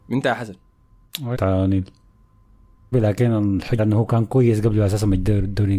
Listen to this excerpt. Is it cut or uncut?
cut